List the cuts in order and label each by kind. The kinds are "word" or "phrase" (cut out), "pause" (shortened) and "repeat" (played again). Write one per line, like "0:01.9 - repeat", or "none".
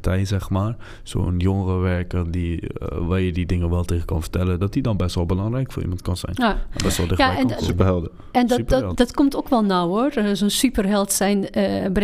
0:08.9 - word